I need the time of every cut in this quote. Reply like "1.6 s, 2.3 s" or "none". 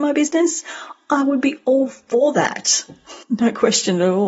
3.2 s